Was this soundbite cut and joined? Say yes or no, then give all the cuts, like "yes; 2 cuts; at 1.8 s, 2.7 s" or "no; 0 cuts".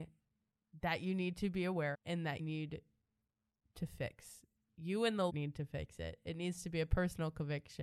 yes; 4 cuts; at 1.9 s, 2.4 s, 4.7 s, 5.3 s